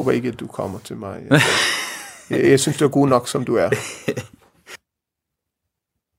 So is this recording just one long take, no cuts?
yes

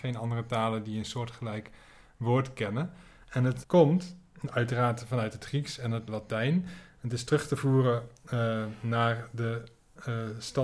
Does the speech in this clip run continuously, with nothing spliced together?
no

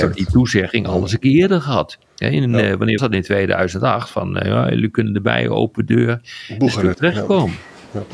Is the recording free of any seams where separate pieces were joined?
no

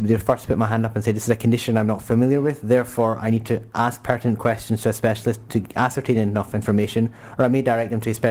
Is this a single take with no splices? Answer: yes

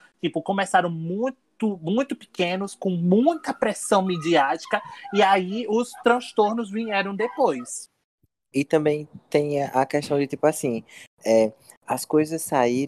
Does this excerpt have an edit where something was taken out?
no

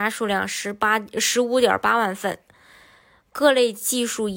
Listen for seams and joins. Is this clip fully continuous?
yes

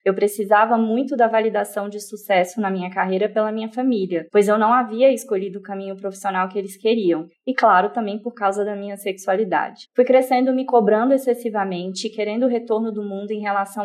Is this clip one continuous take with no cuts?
yes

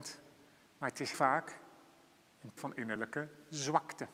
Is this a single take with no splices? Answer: no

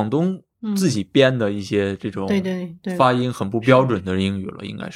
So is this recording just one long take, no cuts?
yes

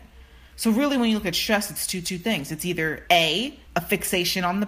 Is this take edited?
yes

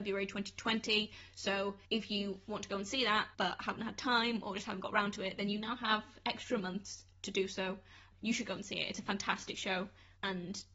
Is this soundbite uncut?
no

